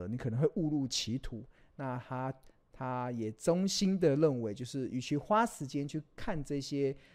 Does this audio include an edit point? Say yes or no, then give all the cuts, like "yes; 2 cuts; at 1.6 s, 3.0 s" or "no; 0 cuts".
no; 0 cuts